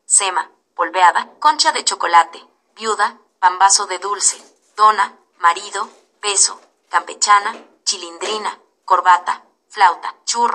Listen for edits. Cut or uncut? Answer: uncut